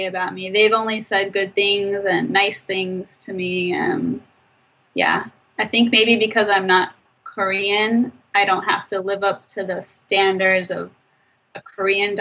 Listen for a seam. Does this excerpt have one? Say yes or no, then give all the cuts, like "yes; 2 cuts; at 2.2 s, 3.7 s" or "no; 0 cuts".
no; 0 cuts